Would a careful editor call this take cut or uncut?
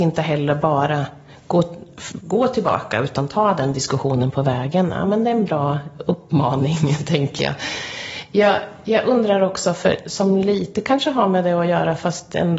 uncut